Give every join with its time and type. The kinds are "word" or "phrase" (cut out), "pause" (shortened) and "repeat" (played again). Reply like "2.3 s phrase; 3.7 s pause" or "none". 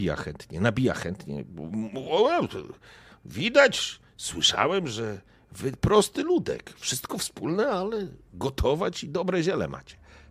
none

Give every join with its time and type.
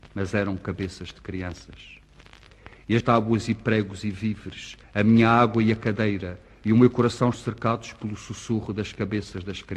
3.0 s word; 4.8 s pause; 7.3 s word

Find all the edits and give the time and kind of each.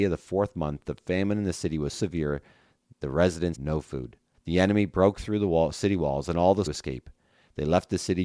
1.9 s word; 3.5 s word; 4.3 s pause; 6.7 s phrase

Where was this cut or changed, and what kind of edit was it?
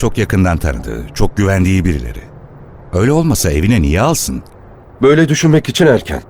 none

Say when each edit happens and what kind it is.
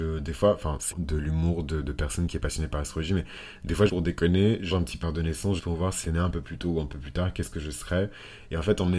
0.9 s word; 3.9 s word; 4.7 s word; 5.0 s word; 5.6 s word; 6.0 s word

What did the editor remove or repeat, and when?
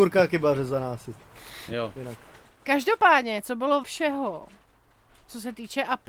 3.8 s word

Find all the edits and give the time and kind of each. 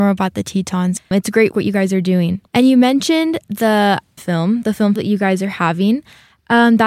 1.5 s word; 2.5 s pause; 4.2 s word; 5.0 s word

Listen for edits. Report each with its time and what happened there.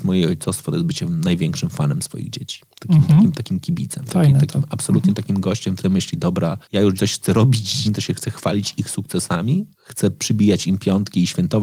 5.8 s word; 6.6 s pause; 7.0 s phrase; 7.8 s word; 9.7 s pause

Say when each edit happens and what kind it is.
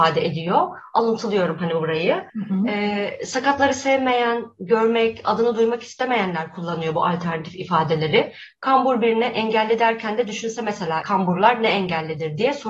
2.3 s pause; 11.0 s word

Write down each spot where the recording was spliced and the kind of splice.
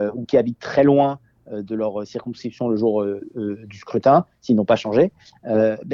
none

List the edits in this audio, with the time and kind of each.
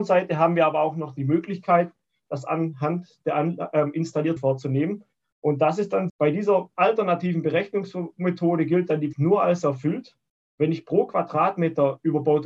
4.4 s word; 6.1 s word; 9.1 s word

